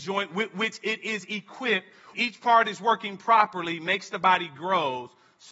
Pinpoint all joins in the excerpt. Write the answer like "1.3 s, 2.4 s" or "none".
2.1 s

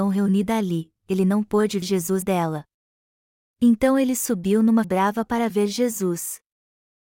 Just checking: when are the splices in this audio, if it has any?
1.8 s, 2.2 s, 4.8 s

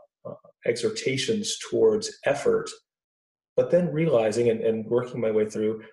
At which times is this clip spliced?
none

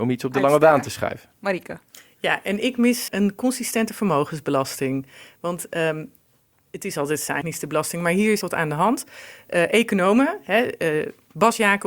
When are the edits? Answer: 3.1 s, 7.4 s, 8.4 s

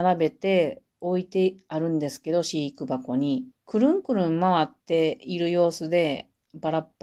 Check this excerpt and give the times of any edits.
3.5 s, 4.8 s

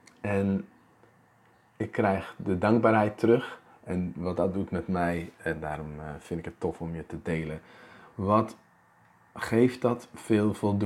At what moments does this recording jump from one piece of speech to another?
none

